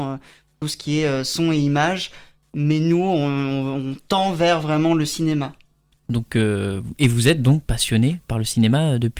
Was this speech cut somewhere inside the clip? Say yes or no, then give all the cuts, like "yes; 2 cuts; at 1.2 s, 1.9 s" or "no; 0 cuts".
no; 0 cuts